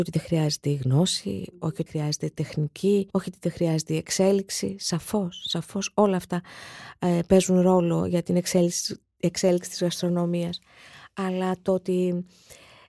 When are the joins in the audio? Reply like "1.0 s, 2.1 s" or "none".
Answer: 1.9 s, 3.1 s